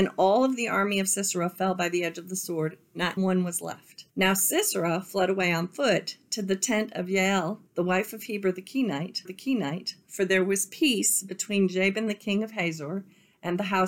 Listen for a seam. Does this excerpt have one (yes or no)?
yes